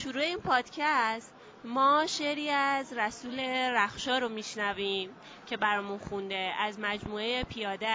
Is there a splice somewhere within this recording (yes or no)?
no